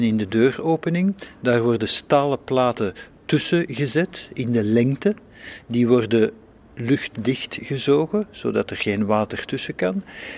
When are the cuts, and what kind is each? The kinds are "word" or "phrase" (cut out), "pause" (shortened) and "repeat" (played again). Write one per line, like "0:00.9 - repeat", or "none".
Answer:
none